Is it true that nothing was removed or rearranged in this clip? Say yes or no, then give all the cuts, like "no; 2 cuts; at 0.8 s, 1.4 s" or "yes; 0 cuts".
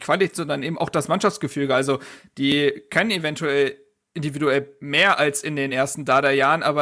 yes; 0 cuts